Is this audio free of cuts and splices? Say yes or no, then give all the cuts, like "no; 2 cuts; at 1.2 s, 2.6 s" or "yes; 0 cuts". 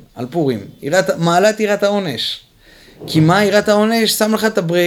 yes; 0 cuts